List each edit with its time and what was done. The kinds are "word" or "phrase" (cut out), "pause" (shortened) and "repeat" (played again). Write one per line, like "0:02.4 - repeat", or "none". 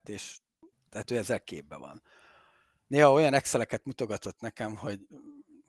none